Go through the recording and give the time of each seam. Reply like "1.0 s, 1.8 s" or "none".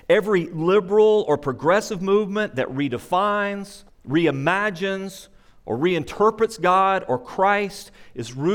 3.9 s